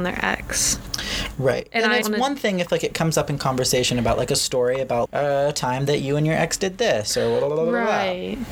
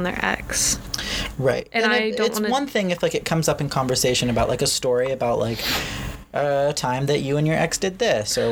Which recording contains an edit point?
first; 2 cuts; at 2.0 s, 5.0 s

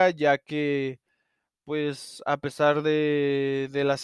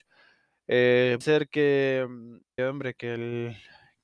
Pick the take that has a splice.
second; 2 cuts; at 1.2 s, 2.6 s

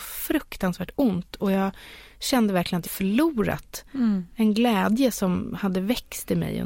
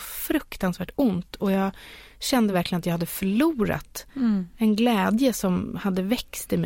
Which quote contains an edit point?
first; 1 cut; at 2.9 s

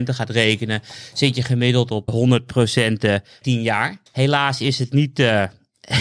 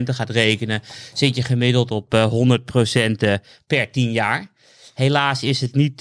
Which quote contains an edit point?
first; 3 cuts; at 2.1 s, 3.4 s, 4.1 s

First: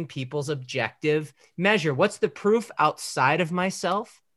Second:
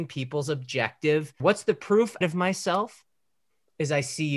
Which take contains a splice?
second; 2 cuts; at 1.4 s, 2.2 s

